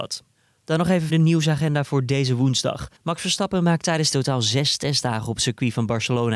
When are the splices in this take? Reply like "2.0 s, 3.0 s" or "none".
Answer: 1.1 s, 3.0 s, 4.1 s